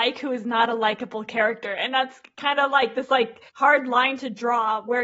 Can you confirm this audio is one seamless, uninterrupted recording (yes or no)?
no